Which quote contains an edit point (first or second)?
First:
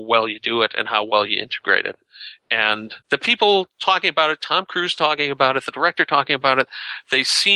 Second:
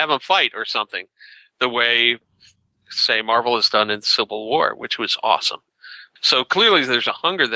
first